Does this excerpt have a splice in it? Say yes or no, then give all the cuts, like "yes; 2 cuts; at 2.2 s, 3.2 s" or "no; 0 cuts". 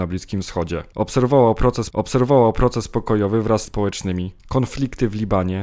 yes; 3 cuts; at 1.9 s, 3.7 s, 4.4 s